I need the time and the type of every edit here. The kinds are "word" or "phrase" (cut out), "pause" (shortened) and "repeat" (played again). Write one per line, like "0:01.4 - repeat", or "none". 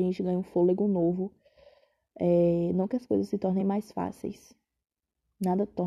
none